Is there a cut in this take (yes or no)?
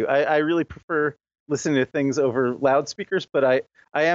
no